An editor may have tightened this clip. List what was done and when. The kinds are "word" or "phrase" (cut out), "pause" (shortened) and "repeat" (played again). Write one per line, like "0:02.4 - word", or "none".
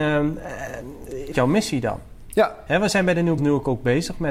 0:01.3 - word
0:03.4 - word